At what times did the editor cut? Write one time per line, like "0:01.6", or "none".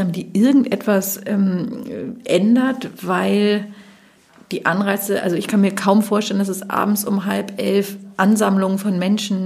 none